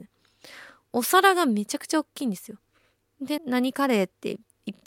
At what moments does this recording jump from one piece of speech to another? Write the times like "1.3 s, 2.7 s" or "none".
3.4 s